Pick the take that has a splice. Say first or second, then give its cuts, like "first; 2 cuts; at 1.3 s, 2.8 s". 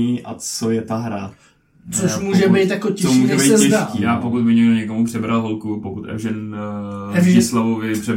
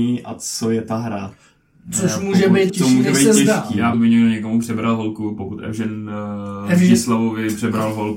second; 2 cuts; at 2.7 s, 3.9 s